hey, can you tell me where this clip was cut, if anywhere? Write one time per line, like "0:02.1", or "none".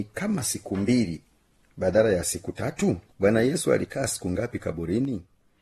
0:03.1